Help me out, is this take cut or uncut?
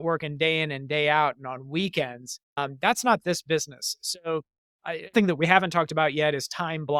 cut